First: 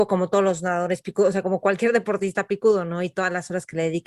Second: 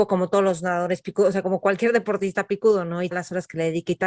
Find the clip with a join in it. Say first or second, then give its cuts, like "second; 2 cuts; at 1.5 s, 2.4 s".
second; 1 cut; at 3.1 s